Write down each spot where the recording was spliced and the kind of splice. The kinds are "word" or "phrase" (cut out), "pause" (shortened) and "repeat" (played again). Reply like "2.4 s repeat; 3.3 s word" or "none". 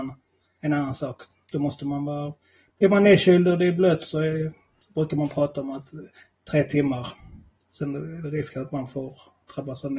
none

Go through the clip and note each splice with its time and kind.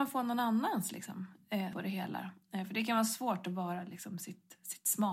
1.7 s word

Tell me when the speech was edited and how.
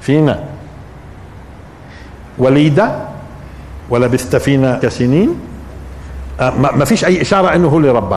4.8 s phrase

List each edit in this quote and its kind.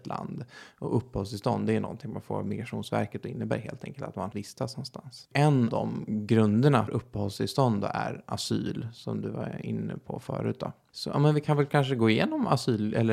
4.3 s phrase; 5.7 s word; 6.9 s word

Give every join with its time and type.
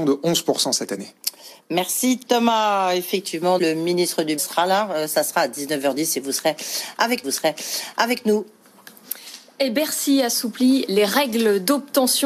3.6 s word; 4.4 s word; 7.2 s repeat

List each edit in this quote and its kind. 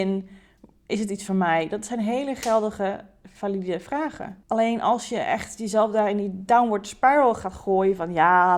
4.4 s pause

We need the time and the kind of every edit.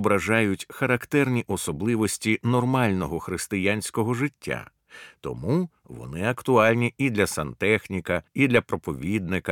8.3 s pause

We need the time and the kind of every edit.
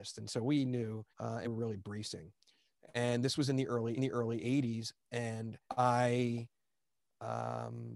1.1 s pause; 1.4 s word; 4.0 s repeat; 5.7 s pause

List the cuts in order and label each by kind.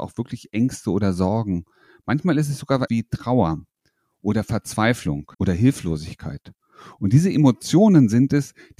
2.9 s word; 5.3 s pause

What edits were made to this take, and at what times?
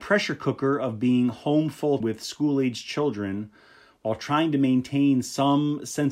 2.0 s word

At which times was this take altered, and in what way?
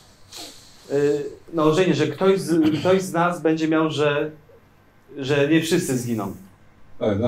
none

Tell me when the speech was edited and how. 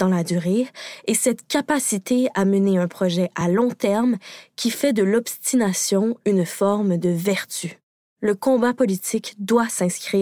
none

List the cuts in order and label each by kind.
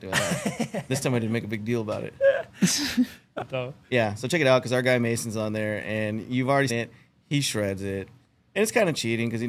3.4 s word; 6.7 s word

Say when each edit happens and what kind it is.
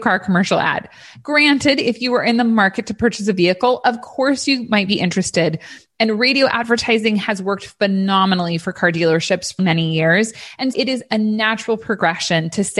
9.6 s word; 10.7 s word

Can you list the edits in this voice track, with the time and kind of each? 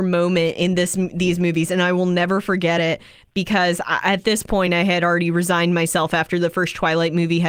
none

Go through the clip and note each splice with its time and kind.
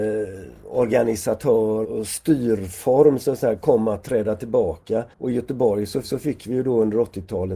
1.8 s phrase; 5.1 s pause; 6.0 s repeat

